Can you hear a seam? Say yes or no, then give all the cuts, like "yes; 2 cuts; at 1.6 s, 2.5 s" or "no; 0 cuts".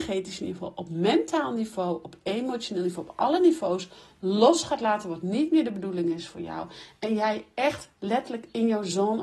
no; 0 cuts